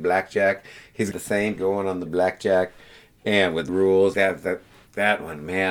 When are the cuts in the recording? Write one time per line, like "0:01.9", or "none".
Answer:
0:01.1
0:01.6
0:02.1
0:03.7
0:04.1